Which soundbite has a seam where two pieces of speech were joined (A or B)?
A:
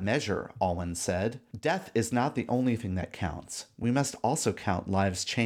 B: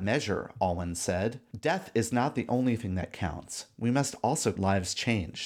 B